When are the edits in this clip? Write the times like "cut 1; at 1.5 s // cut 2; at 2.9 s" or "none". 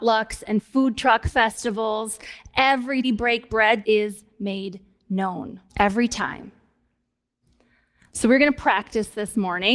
cut 1; at 3.0 s // cut 2; at 3.8 s // cut 3; at 5.7 s